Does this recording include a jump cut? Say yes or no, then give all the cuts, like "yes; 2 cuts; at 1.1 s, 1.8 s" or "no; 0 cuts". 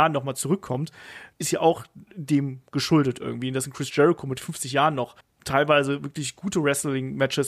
yes; 2 cuts; at 1.3 s, 5.2 s